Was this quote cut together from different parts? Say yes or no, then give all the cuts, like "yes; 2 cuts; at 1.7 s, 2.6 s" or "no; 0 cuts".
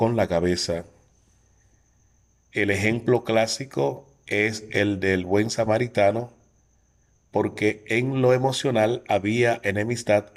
no; 0 cuts